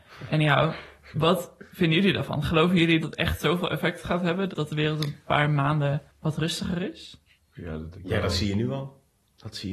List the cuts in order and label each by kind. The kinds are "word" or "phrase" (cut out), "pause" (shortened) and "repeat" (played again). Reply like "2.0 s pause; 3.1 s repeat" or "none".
3.0 s word; 4.5 s word; 6.1 s pause; 7.4 s pause; 7.9 s word